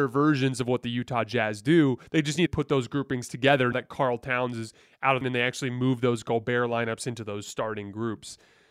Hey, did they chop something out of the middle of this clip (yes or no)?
yes